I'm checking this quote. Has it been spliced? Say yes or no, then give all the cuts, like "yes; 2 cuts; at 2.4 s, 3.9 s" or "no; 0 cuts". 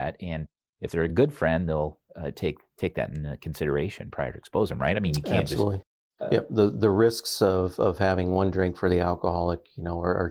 no; 0 cuts